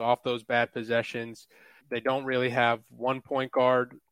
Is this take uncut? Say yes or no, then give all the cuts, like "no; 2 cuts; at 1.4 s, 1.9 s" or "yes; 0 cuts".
no; 1 cut; at 1.8 s